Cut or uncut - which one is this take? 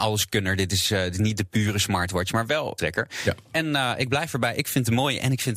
cut